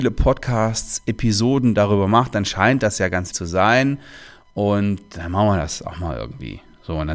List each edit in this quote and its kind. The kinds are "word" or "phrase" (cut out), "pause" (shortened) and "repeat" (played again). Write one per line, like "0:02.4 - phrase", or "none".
0:03.3 - word